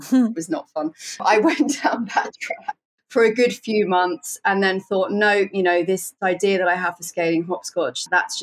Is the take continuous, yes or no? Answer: yes